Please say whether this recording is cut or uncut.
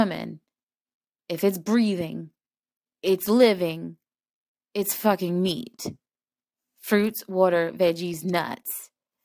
uncut